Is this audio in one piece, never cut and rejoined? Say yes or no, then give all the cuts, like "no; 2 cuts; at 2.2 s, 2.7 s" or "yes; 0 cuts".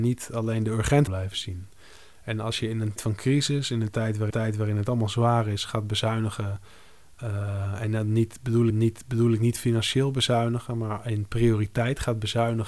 no; 4 cuts; at 1.1 s, 3.0 s, 4.3 s, 8.7 s